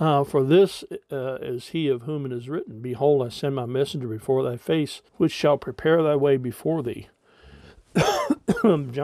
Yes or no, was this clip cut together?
yes